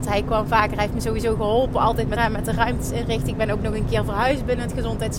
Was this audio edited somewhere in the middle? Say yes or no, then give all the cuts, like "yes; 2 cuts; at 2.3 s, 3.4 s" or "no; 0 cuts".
yes; 1 cut; at 2.2 s